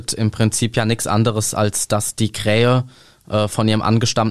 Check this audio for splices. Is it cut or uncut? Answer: uncut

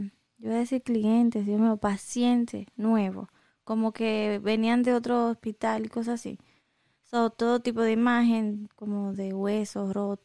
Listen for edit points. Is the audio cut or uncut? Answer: uncut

